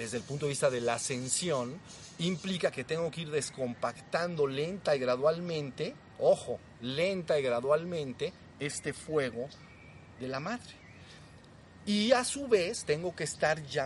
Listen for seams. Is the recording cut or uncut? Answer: uncut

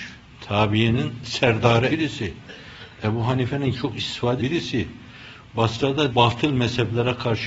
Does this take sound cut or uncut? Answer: cut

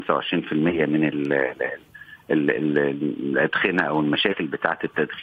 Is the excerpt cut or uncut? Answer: uncut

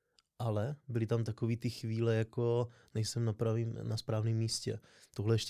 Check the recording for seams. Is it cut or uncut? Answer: uncut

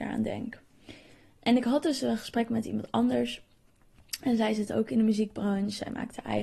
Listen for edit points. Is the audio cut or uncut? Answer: uncut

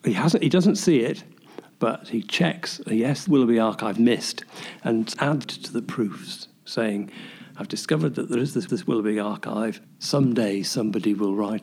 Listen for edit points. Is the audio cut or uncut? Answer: cut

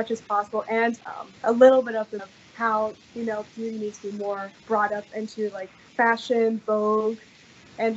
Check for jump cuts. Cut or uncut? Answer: cut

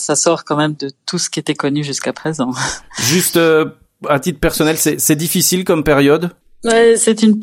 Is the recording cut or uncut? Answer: uncut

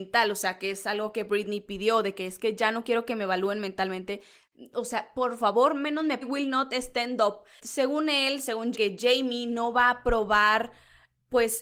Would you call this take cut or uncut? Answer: cut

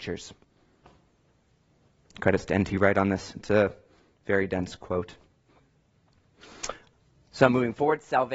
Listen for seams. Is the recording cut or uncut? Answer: uncut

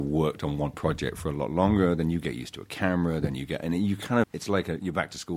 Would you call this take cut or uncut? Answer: cut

